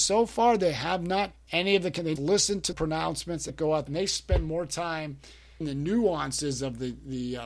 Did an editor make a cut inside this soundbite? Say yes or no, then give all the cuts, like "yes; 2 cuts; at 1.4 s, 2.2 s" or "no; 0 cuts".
yes; 6 cuts; at 1.3 s, 2.2 s, 2.7 s, 3.5 s, 3.9 s, 5.6 s